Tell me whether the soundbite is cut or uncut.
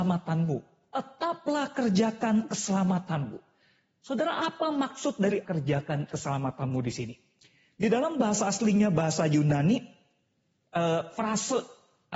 cut